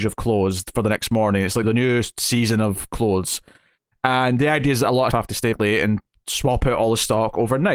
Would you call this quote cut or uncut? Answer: cut